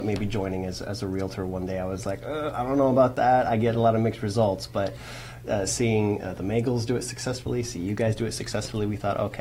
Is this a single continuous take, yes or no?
yes